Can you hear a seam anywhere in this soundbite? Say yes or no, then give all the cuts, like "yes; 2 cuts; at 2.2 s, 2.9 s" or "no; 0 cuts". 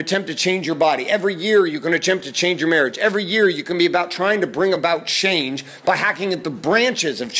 no; 0 cuts